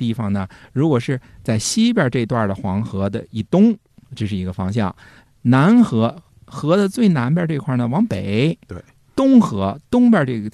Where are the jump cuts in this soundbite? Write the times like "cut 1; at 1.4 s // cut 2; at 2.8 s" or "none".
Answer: none